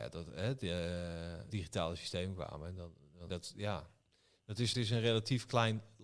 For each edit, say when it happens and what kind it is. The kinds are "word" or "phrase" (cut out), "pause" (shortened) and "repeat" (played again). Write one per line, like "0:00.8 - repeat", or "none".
0:01.5 - word
0:03.3 - word
0:04.7 - word